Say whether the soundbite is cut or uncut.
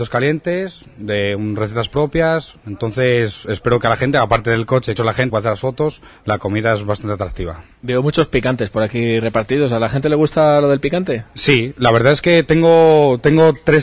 cut